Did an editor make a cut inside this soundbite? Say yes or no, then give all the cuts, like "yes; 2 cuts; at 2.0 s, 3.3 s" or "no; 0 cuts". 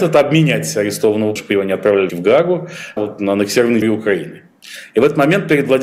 yes; 4 cuts; at 1.4 s, 2.1 s, 3.0 s, 3.8 s